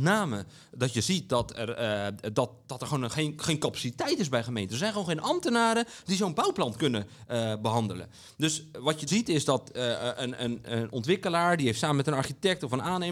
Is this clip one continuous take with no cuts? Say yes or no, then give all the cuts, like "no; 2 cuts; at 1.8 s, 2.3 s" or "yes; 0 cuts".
no; 1 cut; at 9.1 s